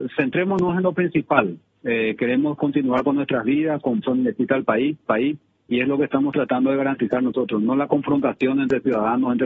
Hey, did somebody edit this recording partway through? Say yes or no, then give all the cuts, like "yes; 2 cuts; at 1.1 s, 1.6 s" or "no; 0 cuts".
yes; 2 cuts; at 4.0 s, 5.1 s